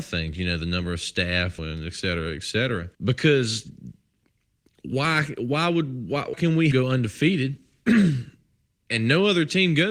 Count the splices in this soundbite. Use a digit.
4